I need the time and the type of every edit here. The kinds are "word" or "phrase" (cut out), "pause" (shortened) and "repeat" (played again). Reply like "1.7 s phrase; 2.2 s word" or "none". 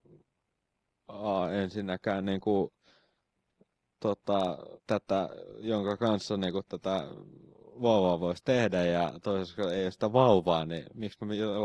4.8 s pause

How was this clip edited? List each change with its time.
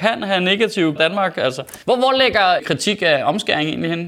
1.0 s phrase; 1.8 s pause; 2.6 s word

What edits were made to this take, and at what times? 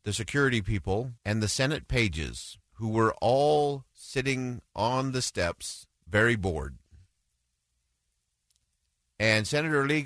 1.2 s pause; 2.7 s pause; 6.0 s pause

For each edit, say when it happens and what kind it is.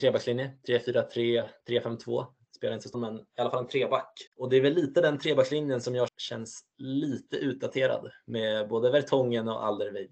2.9 s word; 4.3 s pause; 6.1 s word

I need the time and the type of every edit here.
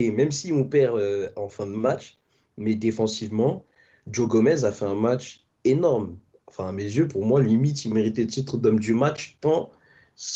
none

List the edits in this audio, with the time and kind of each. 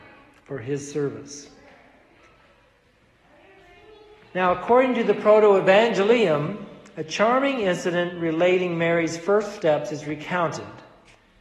none

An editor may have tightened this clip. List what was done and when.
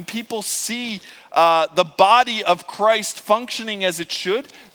none

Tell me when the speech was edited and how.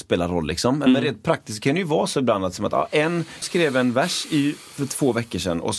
3.4 s word

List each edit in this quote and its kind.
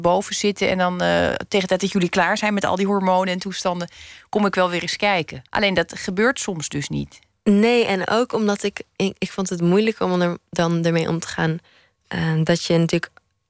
5.5 s pause

